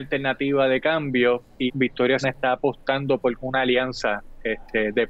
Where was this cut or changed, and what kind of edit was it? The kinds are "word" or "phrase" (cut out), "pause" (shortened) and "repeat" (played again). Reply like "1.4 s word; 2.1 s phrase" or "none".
1.7 s word; 2.2 s word; 3.4 s word